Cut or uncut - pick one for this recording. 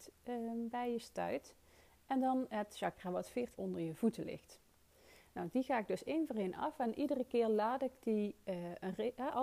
cut